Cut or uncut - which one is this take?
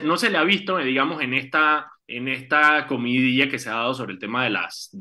cut